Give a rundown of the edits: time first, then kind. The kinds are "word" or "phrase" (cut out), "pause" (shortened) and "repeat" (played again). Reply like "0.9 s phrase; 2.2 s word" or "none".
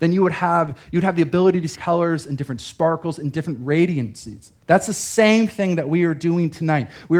1.7 s word; 4.6 s pause